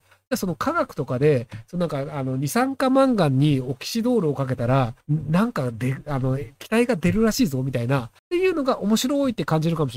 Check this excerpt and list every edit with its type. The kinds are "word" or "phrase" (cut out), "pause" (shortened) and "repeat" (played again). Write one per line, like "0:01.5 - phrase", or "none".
0:05.0 - pause
0:08.2 - pause